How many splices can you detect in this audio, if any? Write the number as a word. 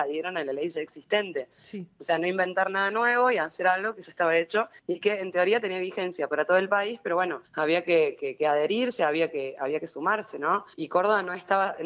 three